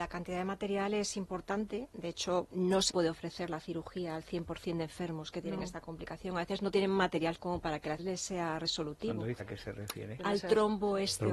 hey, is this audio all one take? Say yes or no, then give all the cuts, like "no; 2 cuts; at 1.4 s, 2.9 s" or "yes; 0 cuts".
no; 5 cuts; at 2.5 s, 2.9 s, 7.3 s, 8.0 s, 9.4 s